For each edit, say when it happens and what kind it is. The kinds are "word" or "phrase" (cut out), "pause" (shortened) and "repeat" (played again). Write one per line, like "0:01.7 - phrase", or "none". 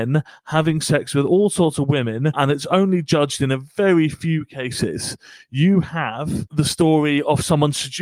none